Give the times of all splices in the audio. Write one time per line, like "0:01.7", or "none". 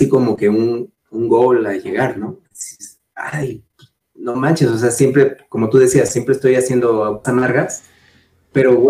0:02.5
0:07.2